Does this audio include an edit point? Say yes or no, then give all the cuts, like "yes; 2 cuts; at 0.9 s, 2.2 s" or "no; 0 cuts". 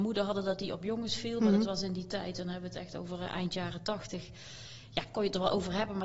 no; 0 cuts